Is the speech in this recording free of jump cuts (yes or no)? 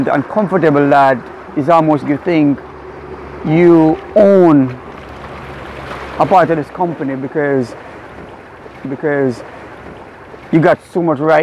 no